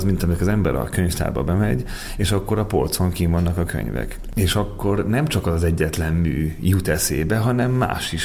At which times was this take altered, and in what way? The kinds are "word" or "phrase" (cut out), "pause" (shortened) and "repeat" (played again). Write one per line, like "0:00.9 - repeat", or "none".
none